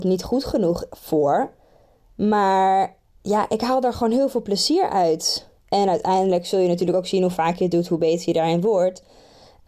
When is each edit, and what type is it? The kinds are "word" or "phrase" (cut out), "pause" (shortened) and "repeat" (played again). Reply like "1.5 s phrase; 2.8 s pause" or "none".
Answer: 3.1 s pause; 5.6 s pause